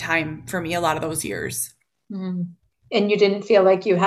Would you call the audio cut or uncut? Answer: uncut